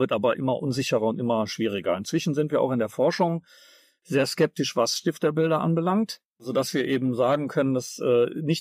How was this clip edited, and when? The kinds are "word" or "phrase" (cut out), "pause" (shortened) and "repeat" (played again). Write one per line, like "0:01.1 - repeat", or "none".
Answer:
none

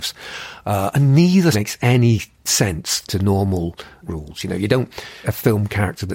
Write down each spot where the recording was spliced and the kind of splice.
0:01.5 - word
0:03.1 - word
0:04.0 - word
0:05.2 - word

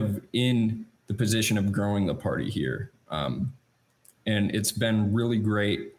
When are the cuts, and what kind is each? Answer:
none

